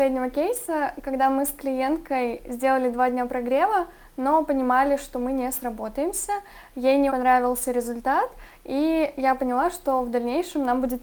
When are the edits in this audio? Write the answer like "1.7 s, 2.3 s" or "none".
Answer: 7.1 s